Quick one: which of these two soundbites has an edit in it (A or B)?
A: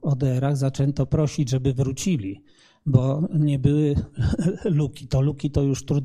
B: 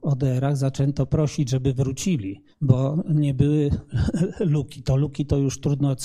B